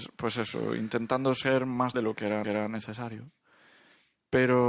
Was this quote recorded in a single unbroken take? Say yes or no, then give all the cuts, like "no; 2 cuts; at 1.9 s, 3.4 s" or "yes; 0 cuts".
no; 2 cuts; at 1.9 s, 2.4 s